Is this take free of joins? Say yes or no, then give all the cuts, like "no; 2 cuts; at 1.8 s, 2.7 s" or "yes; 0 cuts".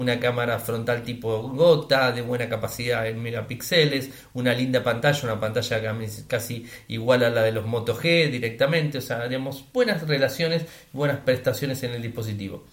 yes; 0 cuts